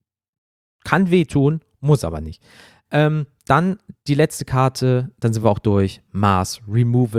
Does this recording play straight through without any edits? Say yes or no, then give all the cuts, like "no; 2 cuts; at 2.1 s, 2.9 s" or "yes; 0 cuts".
yes; 0 cuts